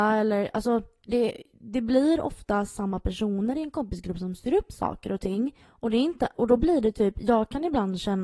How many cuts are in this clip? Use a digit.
1